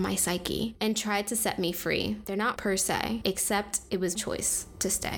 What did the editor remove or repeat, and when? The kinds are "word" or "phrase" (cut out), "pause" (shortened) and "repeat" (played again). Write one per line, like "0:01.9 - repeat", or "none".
0:02.6 - word
0:04.1 - word